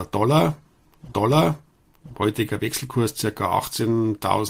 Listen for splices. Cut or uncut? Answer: cut